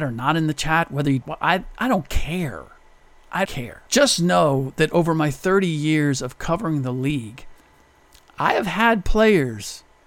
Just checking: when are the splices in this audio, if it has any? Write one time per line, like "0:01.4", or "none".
0:01.2
0:03.4
0:03.9